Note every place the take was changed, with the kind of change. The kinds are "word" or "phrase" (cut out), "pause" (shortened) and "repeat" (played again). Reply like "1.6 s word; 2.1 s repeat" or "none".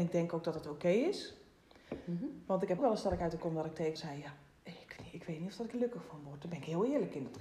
2.8 s word; 3.4 s word; 4.0 s word; 5.0 s word; 5.7 s word